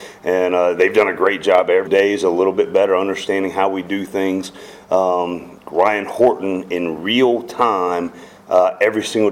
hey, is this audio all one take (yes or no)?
no